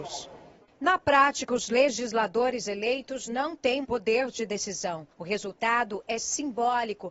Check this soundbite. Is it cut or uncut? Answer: cut